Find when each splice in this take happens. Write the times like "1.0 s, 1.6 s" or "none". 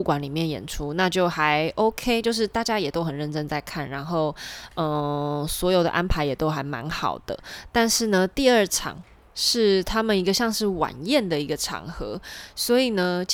none